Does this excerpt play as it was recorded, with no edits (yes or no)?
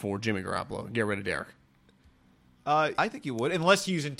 no